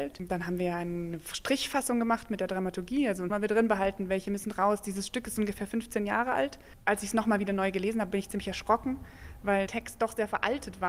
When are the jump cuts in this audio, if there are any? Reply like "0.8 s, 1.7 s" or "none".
3.3 s, 9.7 s